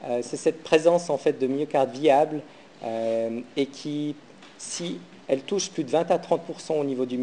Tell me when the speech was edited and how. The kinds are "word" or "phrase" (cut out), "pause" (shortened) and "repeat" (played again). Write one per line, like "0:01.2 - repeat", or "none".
0:05.2 - pause